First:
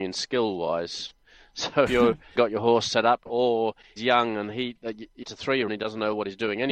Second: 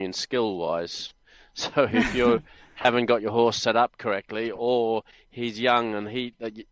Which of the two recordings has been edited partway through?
first; 6 cuts; at 1.9 s, 2.4 s, 3.3 s, 4.0 s, 5.2 s, 5.7 s

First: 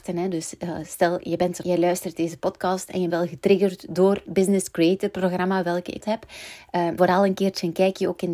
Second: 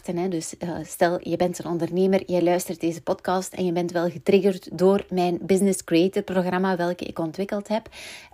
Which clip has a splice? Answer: first; 5 cuts; at 1.6 s, 3.1 s, 4.3 s, 6.0 s, 7.0 s

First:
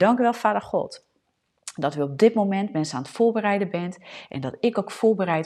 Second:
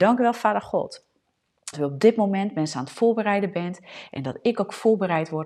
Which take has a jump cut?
second; 1 cut; at 1.7 s

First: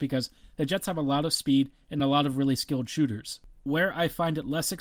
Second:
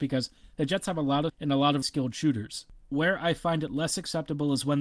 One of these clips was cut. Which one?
second; 2 cuts; at 1.3 s, 1.8 s

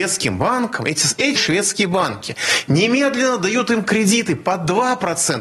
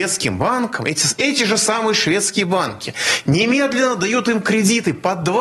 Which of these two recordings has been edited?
first; 1 cut; at 1.4 s

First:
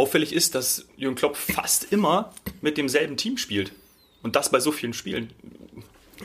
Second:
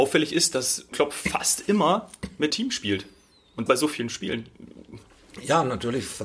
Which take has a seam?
second; 3 cuts; at 0.9 s, 2.5 s, 3.7 s

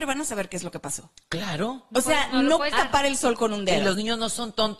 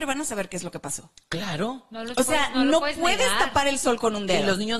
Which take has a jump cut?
first; 2 cuts; at 1.9 s, 2.7 s

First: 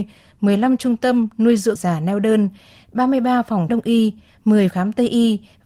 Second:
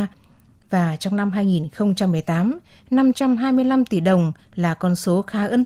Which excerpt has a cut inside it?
first; 3 cuts; at 1.8 s, 3.7 s, 4.7 s

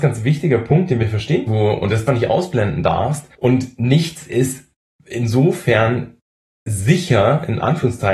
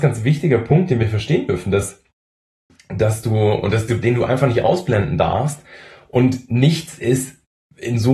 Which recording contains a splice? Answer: first; 3 cuts; at 1.5 s, 2.1 s, 3.3 s

